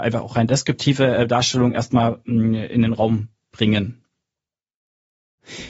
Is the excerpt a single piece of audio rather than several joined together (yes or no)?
yes